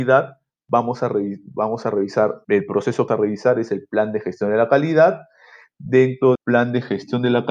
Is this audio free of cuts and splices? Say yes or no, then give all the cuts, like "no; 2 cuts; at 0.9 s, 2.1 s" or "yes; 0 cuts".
no; 3 cuts; at 2.4 s, 3.1 s, 6.4 s